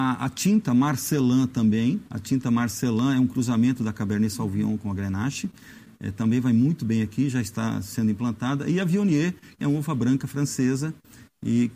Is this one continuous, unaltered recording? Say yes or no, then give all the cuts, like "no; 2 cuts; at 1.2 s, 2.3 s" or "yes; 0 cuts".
no; 2 cuts; at 2.1 s, 9.6 s